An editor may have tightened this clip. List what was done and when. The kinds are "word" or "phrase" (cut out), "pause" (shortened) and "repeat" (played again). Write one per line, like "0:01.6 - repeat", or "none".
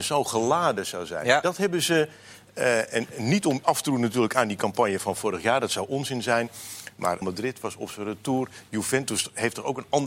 0:03.6 - word
0:07.2 - word